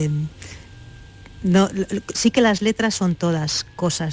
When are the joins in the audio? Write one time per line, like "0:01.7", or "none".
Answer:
none